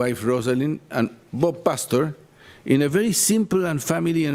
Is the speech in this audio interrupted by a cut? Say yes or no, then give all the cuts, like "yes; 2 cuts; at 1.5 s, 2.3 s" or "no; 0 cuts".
no; 0 cuts